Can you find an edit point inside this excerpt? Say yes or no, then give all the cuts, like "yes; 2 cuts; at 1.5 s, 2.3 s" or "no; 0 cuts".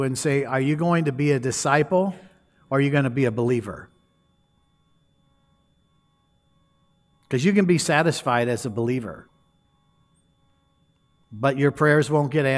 no; 0 cuts